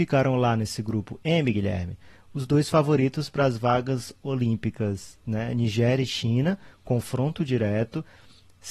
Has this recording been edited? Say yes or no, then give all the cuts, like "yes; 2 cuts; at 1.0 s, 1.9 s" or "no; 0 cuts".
no; 0 cuts